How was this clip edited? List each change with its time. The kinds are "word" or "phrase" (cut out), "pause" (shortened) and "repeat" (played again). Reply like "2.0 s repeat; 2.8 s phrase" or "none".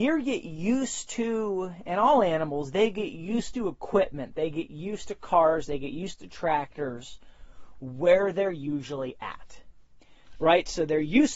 none